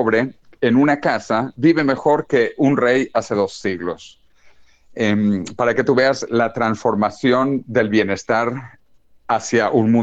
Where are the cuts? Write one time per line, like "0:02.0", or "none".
none